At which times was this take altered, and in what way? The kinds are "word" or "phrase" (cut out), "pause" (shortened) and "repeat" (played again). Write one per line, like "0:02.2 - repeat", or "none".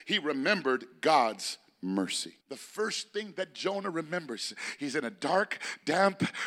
0:02.4 - pause

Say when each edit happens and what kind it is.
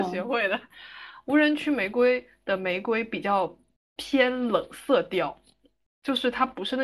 none

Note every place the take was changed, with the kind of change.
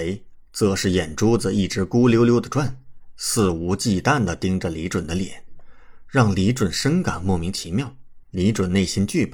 0:08.2 - pause

